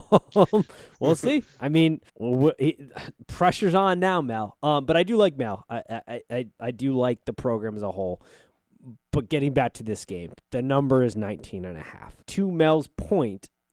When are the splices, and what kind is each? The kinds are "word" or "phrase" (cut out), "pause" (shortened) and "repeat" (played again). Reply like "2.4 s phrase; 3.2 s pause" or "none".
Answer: 2.1 s pause; 10.4 s pause; 12.2 s pause